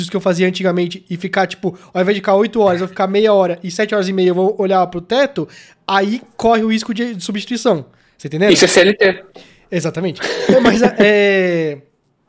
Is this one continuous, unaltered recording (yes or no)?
yes